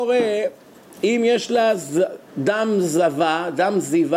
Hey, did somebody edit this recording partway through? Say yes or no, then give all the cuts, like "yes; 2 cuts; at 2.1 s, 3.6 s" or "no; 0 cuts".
yes; 1 cut; at 2.3 s